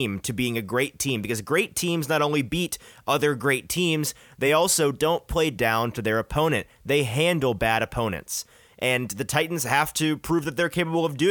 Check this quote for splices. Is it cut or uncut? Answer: uncut